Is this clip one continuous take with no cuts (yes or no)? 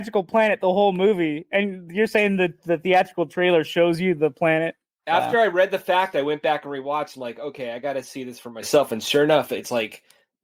yes